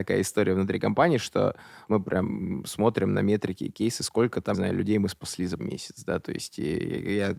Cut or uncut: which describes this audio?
cut